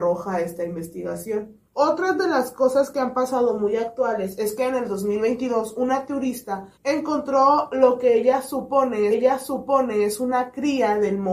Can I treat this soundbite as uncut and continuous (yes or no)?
no